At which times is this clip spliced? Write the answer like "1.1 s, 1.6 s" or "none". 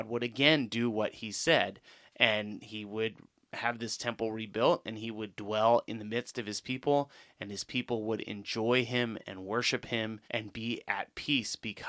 10.2 s